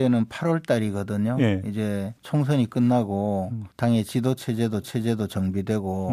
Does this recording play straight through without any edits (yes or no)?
no